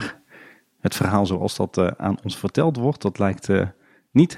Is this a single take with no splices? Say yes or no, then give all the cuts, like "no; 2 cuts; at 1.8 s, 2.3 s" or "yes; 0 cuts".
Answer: yes; 0 cuts